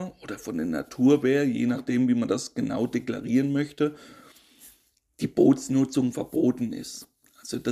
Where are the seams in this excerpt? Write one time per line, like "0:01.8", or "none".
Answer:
none